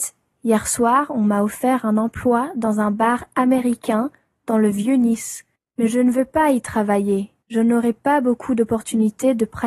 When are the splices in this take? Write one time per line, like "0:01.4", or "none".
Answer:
0:05.6
0:07.4